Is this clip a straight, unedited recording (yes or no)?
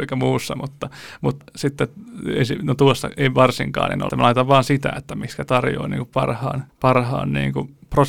no